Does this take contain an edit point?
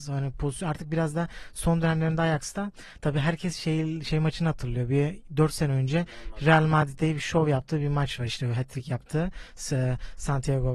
no; 0 cuts

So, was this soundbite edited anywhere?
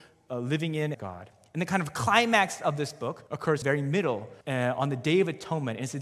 yes; 4 cuts; at 0.9 s, 3.3 s, 3.6 s, 4.4 s

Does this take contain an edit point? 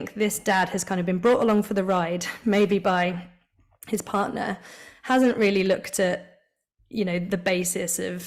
no; 0 cuts

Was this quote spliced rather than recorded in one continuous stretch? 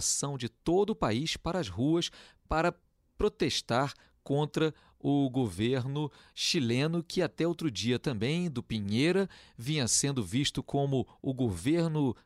no; 0 cuts

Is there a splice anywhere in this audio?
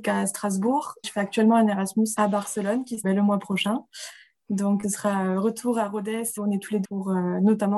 yes; 6 cuts; at 1.0 s, 2.2 s, 3.0 s, 4.8 s, 6.4 s, 6.8 s

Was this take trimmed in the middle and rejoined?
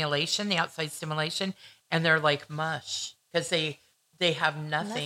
no; 0 cuts

